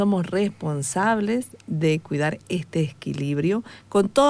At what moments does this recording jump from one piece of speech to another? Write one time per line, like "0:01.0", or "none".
none